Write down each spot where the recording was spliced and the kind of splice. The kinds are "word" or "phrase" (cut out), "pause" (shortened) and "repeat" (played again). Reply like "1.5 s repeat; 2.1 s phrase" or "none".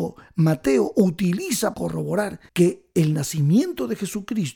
1.7 s word; 2.5 s pause